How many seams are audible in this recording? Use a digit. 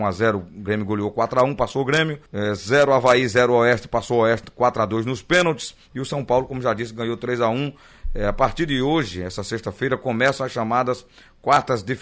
1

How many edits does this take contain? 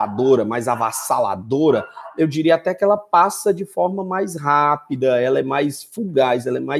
0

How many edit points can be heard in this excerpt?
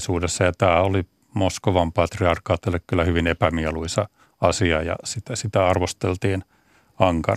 0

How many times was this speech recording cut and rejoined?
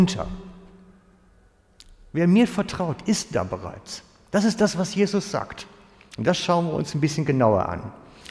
0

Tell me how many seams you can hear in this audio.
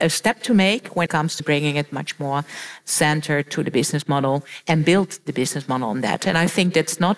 2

